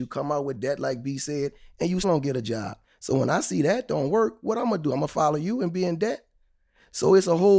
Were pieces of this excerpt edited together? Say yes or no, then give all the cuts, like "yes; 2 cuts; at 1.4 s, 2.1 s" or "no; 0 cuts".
yes; 1 cut; at 2.0 s